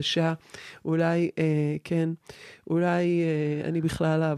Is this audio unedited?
yes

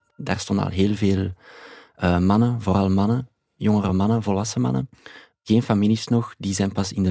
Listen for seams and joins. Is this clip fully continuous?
yes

